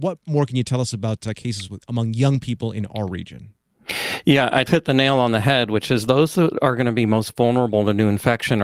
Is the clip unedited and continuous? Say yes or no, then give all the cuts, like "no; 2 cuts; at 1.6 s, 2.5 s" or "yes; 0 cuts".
no; 1 cut; at 4.7 s